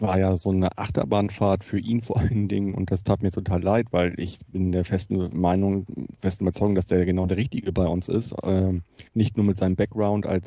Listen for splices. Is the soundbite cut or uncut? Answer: cut